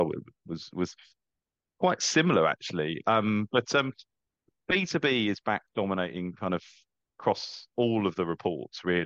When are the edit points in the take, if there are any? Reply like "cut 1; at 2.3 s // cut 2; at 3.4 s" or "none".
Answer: none

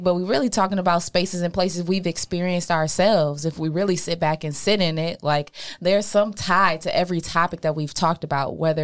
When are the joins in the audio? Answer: none

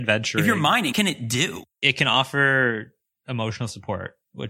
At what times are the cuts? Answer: cut 1; at 0.9 s // cut 2; at 1.7 s

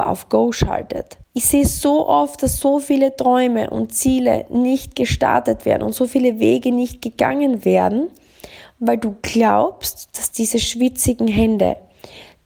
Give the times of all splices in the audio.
cut 1; at 1.2 s

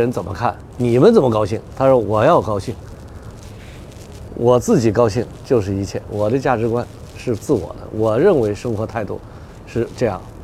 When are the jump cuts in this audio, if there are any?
cut 1; at 1.7 s

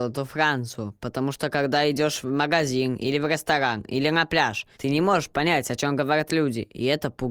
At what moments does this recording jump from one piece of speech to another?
cut 1; at 4.7 s

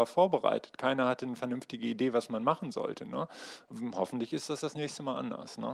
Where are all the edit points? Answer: none

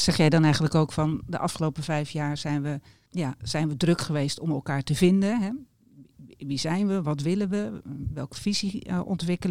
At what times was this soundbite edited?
cut 1; at 3.1 s

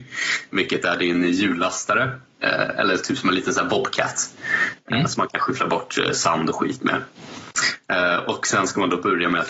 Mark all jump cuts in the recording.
none

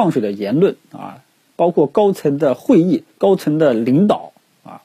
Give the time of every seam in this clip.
cut 1; at 3.1 s

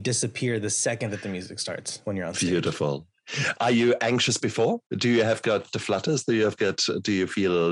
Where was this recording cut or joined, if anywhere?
cut 1; at 4.9 s

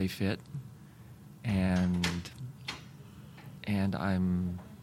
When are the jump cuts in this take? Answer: cut 1; at 3.6 s

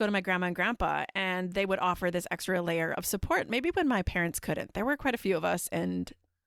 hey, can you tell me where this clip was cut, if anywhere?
none

